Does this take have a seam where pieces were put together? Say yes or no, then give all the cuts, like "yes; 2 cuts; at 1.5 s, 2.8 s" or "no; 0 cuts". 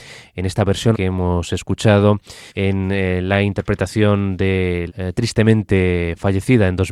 yes; 3 cuts; at 0.9 s, 2.5 s, 4.9 s